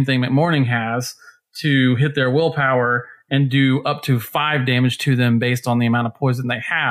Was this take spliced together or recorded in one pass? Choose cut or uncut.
uncut